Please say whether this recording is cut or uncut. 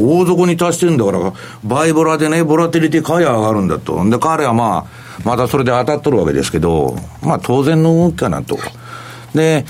uncut